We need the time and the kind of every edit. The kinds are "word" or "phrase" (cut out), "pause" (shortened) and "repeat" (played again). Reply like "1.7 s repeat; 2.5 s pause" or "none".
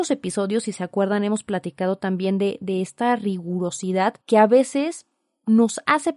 4.2 s pause